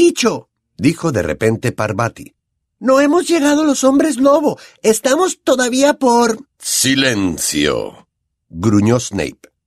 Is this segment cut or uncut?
uncut